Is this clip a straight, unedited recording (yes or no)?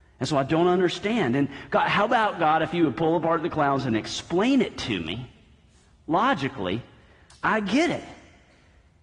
yes